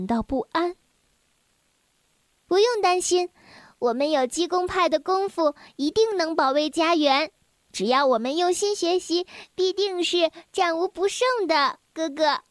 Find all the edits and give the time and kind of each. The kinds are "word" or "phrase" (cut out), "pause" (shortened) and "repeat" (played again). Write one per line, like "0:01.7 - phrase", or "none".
none